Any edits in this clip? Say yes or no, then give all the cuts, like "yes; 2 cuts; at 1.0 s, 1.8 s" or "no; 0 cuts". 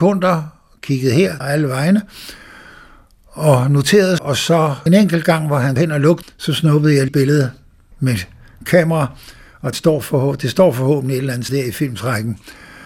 yes; 9 cuts; at 1.4 s, 4.2 s, 4.9 s, 5.8 s, 6.2 s, 7.1 s, 7.9 s, 9.7 s, 11.5 s